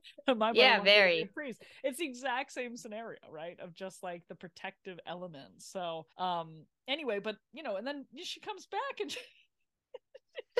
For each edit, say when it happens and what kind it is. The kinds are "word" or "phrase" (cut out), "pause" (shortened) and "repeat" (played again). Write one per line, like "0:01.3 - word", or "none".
0:06.1 - pause